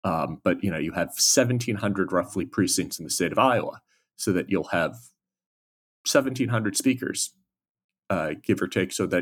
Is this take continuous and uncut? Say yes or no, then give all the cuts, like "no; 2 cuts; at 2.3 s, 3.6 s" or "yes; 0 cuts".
yes; 0 cuts